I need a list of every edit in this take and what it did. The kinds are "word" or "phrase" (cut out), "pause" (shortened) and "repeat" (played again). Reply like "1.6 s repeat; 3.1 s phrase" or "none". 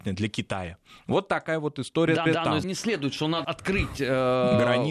2.3 s repeat; 2.6 s word; 3.4 s word